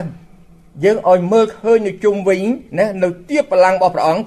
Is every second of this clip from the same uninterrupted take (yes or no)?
no